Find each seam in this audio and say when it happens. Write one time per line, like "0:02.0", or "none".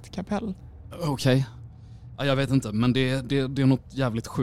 none